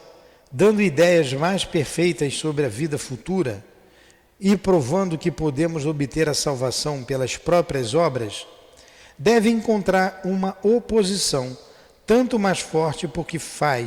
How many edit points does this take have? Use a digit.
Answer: 0